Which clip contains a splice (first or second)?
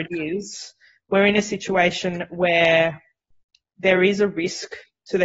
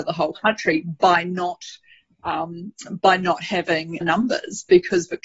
second